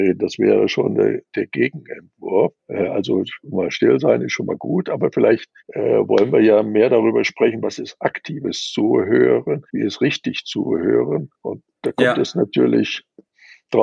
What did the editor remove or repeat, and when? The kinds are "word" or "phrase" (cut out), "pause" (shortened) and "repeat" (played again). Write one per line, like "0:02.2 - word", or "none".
0:02.6 - pause
0:05.6 - pause
0:09.7 - pause
0:11.3 - pause